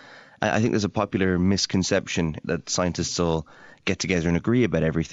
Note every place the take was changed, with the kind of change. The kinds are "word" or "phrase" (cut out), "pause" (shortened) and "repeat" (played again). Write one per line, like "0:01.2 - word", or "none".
none